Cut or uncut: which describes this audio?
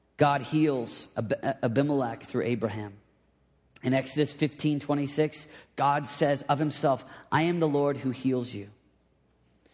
uncut